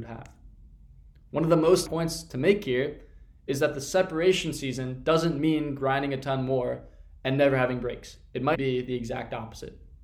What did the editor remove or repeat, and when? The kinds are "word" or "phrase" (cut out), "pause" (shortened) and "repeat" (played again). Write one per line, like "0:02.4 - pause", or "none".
0:01.8 - word
0:08.5 - word